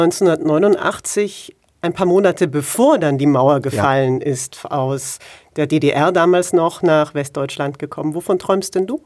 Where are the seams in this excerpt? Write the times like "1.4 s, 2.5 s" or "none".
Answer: none